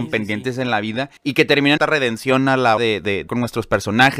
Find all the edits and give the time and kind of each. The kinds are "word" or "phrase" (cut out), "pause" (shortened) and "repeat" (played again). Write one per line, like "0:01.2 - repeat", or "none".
0:01.2 - pause
0:01.8 - phrase
0:02.8 - word
0:03.3 - word